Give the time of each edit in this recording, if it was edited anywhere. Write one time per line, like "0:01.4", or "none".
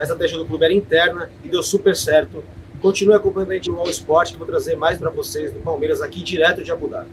0:03.7
0:05.0